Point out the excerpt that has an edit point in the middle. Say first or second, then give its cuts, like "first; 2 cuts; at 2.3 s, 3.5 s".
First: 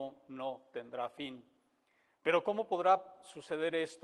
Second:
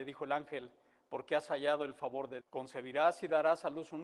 second; 1 cut; at 2.4 s